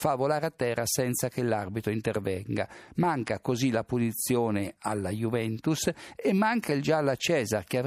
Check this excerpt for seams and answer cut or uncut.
uncut